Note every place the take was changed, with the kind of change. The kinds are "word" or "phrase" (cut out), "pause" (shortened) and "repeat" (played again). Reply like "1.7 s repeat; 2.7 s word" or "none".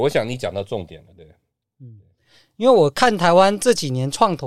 none